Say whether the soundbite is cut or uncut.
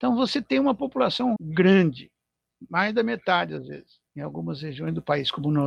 cut